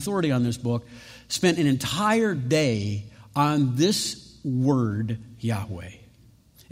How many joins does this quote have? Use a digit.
0